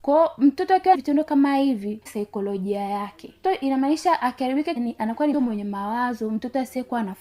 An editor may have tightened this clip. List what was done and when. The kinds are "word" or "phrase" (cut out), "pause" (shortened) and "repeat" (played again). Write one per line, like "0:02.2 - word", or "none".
0:00.9 - word
0:02.1 - word
0:03.4 - word
0:04.8 - word
0:05.3 - word